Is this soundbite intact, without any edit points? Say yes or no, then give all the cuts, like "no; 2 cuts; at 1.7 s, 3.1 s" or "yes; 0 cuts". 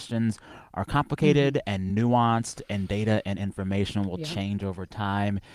yes; 0 cuts